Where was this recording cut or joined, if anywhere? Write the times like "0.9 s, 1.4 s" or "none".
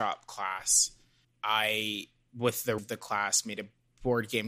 1.2 s, 2.8 s